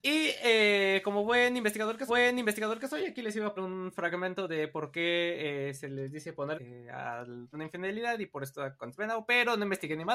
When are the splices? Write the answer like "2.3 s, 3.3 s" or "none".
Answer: 2.1 s, 3.6 s, 6.5 s, 7.5 s, 9.0 s